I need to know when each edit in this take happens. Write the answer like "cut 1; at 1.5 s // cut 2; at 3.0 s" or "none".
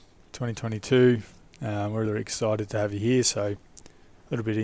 none